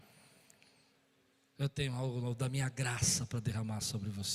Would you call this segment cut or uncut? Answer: uncut